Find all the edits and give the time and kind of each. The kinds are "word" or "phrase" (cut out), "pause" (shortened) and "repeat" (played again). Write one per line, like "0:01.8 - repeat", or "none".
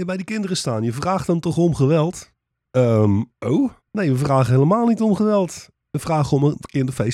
none